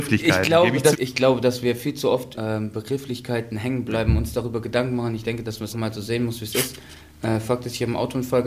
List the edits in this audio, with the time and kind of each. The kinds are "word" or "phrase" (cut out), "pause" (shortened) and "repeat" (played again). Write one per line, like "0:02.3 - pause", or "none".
0:00.9 - word
0:02.3 - word
0:05.7 - word